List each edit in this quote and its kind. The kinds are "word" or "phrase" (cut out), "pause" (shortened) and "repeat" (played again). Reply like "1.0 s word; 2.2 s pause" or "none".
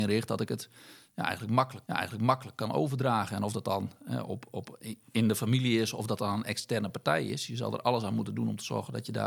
1.9 s repeat